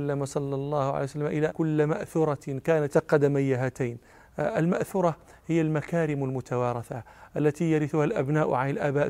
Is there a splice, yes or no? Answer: yes